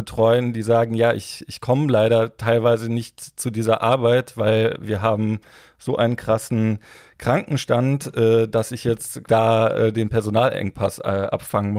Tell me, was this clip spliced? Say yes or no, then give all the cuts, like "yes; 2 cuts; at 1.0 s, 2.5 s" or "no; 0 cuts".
no; 0 cuts